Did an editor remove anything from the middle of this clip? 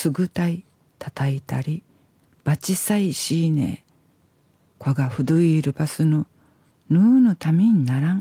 no; 0 cuts

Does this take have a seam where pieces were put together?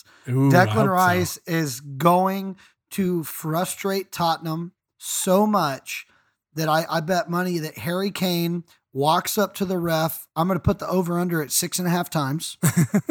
no; 0 cuts

